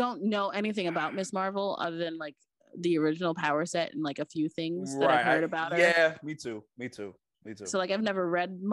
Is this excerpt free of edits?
yes; 0 cuts

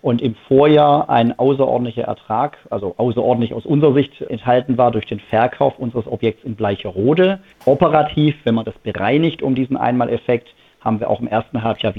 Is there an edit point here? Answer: no; 0 cuts

